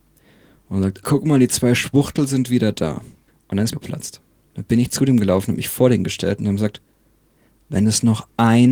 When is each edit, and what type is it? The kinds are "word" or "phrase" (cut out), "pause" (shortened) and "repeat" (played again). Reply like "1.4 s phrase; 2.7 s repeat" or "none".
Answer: 1.0 s word; 3.3 s pause; 3.7 s phrase

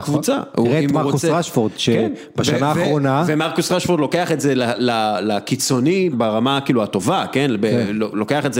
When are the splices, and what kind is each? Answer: 6.1 s word

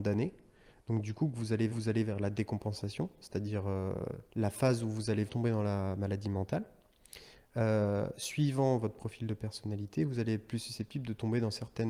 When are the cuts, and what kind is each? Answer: 1.7 s repeat; 4.3 s pause; 5.3 s word

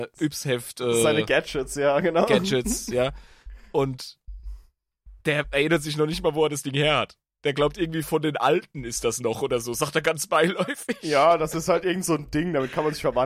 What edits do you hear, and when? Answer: none

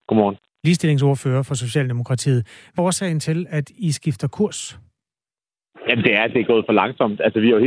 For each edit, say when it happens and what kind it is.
2.8 s word

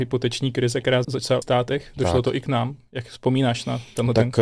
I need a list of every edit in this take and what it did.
1.0 s word; 1.4 s phrase

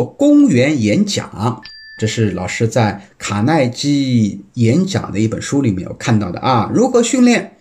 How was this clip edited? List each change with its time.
none

